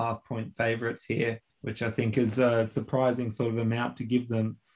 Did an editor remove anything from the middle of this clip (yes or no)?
yes